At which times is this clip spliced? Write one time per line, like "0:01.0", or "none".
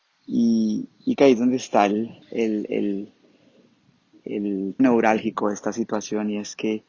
0:01.2
0:02.2
0:04.8